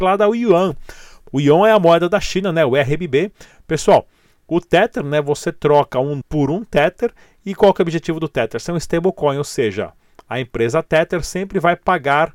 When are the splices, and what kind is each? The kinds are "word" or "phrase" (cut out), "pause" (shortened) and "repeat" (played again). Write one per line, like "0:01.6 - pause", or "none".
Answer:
0:06.2 - word

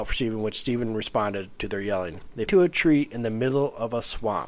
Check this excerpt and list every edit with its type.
0:02.5 - phrase

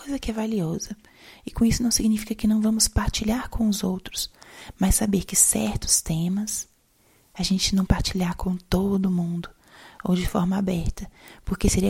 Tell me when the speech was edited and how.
0:07.9 - word

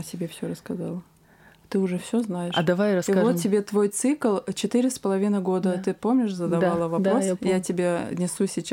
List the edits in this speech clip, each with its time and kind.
none

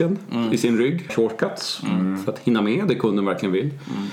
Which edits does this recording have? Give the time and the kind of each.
0:01.1 - phrase

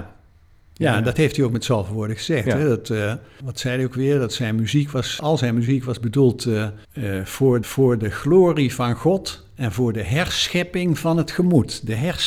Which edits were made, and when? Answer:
0:03.4 - word
0:05.2 - word
0:06.8 - pause
0:07.6 - repeat

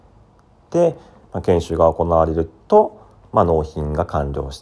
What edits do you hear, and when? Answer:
none

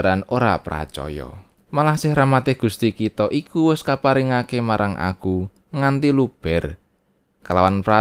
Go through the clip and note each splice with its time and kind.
0:01.6 - pause

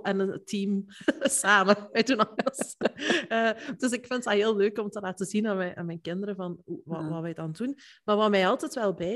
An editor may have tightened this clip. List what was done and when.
none

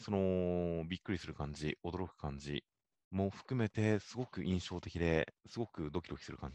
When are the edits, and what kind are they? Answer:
0:05.4 - pause

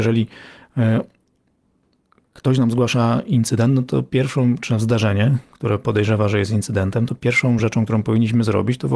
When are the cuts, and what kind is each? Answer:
none

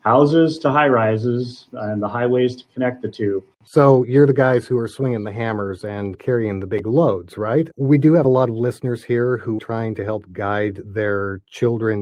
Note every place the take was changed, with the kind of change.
0:09.6 - word

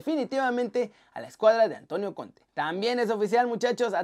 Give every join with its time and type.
0:02.5 - pause

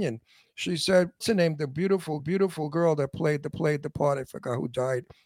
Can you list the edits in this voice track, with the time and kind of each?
0:01.2 - word
0:02.2 - repeat
0:03.5 - repeat

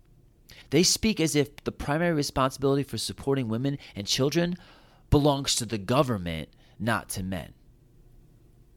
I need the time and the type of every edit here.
none

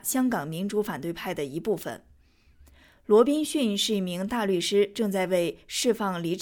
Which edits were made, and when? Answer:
none

